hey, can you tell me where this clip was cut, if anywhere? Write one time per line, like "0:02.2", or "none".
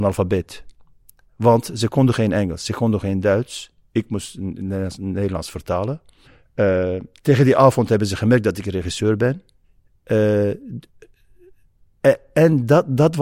0:06.2
0:09.6